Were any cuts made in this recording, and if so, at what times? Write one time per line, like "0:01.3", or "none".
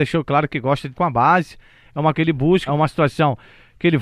0:00.9
0:02.1
0:02.7